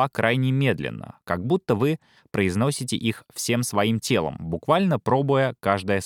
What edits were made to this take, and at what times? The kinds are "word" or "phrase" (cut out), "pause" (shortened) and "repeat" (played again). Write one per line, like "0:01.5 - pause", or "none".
none